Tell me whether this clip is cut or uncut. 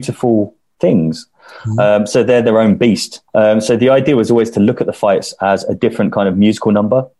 cut